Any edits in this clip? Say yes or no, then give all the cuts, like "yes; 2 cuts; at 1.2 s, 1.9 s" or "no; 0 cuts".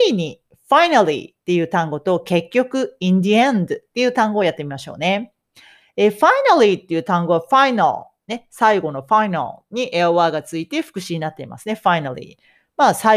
no; 0 cuts